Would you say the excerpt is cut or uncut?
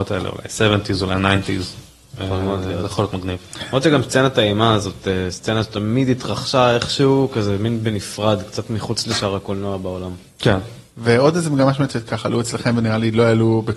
cut